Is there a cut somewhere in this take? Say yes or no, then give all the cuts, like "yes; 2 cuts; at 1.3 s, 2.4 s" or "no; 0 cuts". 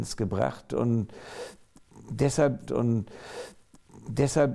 yes; 1 cut; at 2.6 s